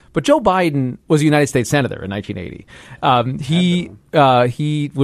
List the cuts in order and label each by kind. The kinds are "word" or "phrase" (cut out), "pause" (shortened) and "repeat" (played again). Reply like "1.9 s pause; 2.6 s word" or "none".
1.0 s pause